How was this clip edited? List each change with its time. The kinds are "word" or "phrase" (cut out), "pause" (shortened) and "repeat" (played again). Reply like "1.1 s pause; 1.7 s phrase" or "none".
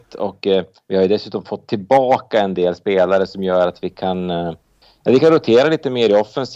4.8 s pause